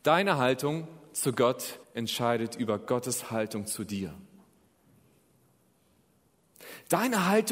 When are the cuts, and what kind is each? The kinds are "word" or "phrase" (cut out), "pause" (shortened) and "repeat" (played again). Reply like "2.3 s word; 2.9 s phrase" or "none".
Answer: 1.8 s pause